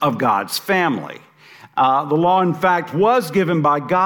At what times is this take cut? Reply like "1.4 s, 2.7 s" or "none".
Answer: none